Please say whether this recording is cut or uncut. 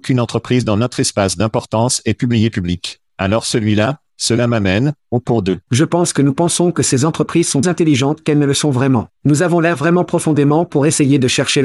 cut